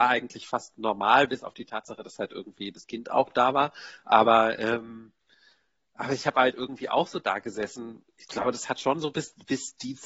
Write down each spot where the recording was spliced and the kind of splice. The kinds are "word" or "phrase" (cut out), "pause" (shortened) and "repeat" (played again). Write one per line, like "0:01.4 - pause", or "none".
none